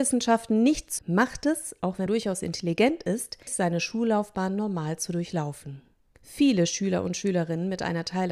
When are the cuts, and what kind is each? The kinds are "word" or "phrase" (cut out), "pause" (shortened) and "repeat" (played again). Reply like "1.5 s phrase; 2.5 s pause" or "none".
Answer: 1.0 s word; 2.1 s word; 3.5 s word